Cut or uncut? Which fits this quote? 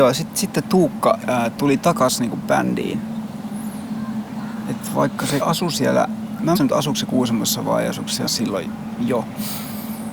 cut